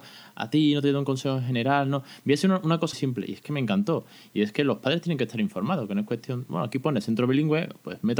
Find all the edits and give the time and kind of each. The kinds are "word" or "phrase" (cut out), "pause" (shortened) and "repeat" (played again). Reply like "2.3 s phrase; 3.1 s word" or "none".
2.9 s word